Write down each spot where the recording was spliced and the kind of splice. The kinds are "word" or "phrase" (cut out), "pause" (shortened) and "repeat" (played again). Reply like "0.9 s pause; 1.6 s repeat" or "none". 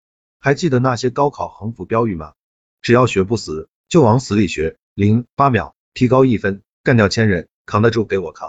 2.5 s pause; 5.8 s pause; 7.5 s pause